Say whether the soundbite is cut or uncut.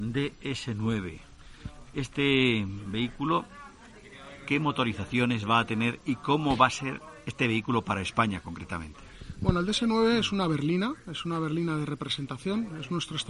uncut